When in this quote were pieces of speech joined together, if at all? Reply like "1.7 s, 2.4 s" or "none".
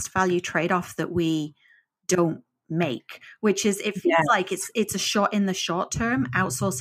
none

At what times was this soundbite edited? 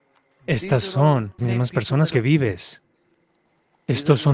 1.4 s, 2.1 s

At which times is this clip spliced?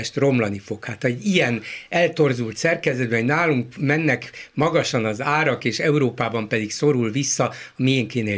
none

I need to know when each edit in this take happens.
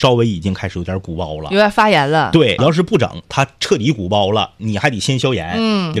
2.6 s

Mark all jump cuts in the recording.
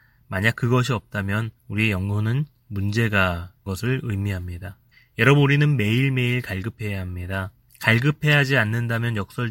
1.6 s, 3.7 s, 4.9 s, 7.7 s

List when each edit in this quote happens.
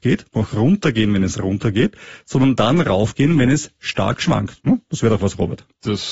none

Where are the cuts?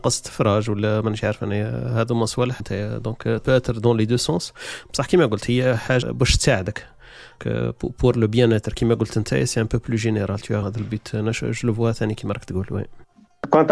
2.6 s, 3.4 s, 6.0 s, 7.4 s, 8.1 s, 10.6 s

